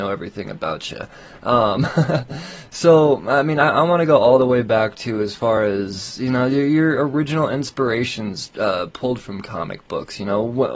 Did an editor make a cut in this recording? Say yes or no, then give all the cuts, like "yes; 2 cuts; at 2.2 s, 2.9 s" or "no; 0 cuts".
no; 0 cuts